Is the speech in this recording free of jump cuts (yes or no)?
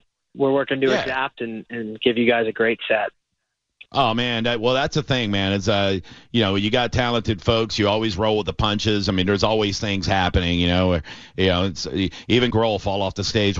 no